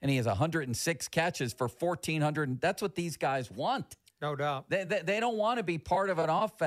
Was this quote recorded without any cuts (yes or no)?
yes